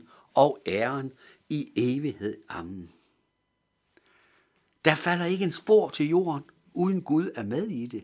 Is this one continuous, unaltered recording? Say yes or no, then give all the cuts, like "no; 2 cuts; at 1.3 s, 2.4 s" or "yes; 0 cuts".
yes; 0 cuts